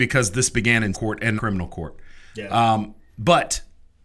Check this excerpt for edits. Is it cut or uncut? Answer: cut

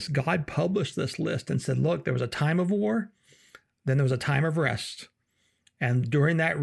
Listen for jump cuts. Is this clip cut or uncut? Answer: uncut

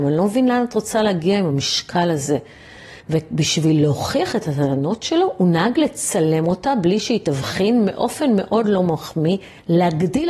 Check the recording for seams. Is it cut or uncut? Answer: cut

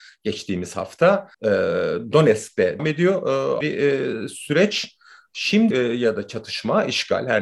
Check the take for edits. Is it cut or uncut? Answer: cut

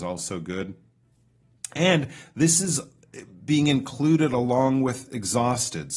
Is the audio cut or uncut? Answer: uncut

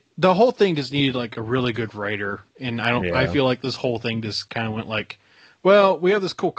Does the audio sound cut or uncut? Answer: uncut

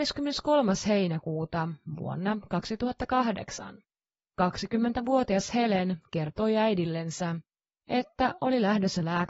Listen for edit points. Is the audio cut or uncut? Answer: uncut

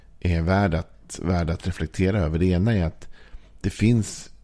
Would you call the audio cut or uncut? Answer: uncut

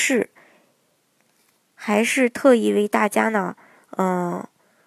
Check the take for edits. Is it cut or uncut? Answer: uncut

